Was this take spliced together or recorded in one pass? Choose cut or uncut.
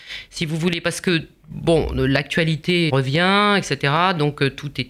cut